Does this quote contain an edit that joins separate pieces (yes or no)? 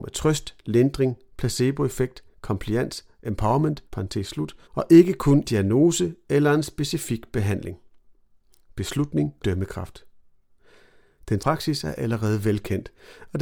yes